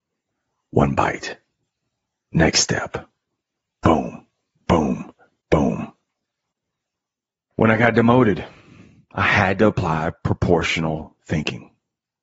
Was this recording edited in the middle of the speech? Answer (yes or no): no